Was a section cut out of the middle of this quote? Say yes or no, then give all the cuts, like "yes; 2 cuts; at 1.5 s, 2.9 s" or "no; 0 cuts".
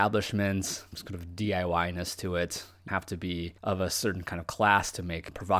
yes; 1 cut; at 2.9 s